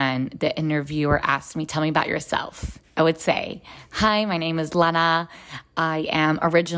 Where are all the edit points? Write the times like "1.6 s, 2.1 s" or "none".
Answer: 2.8 s